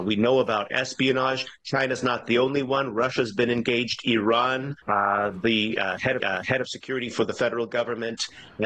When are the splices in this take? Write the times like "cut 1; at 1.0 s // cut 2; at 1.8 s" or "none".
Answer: cut 1; at 4.8 s // cut 2; at 6.2 s